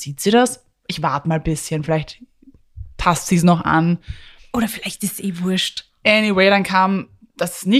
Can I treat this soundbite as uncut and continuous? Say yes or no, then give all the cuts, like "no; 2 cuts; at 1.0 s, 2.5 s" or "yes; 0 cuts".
yes; 0 cuts